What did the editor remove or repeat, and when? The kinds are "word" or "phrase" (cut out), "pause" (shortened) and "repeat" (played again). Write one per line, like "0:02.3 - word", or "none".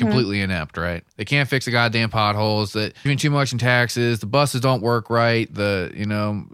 0:01.1 - pause
0:03.1 - word